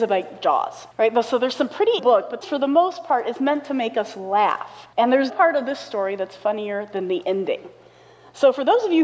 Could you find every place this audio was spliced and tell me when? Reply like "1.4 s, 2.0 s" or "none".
0.9 s, 2.0 s, 2.4 s, 4.9 s, 5.3 s